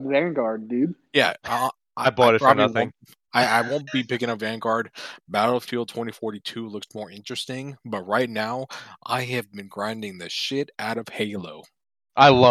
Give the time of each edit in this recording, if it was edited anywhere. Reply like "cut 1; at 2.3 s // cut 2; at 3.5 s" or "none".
none